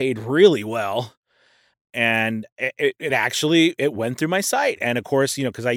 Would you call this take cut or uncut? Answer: uncut